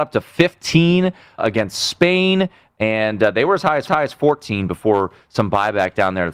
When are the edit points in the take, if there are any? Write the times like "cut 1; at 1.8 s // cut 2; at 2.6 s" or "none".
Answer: cut 1; at 1.4 s // cut 2; at 3.9 s